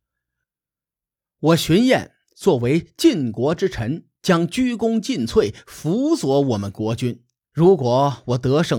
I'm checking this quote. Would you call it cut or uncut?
cut